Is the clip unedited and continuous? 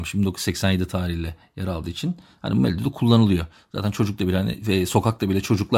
yes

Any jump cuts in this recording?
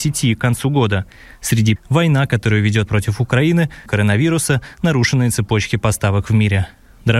yes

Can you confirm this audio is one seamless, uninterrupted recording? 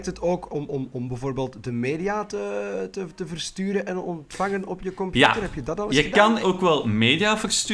no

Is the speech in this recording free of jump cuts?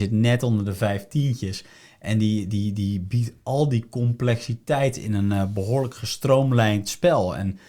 yes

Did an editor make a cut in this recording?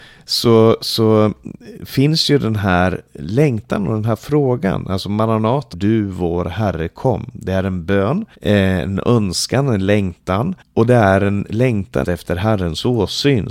yes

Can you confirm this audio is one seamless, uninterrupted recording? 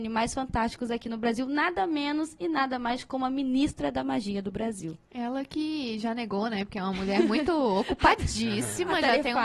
yes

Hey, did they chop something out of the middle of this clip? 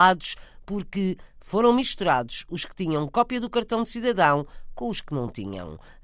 no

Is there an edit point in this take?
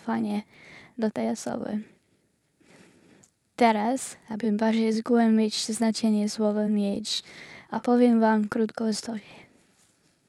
no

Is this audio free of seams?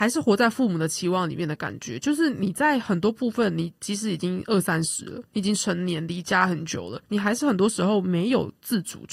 no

